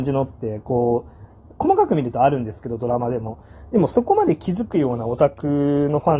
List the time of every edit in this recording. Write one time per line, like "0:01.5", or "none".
0:01.6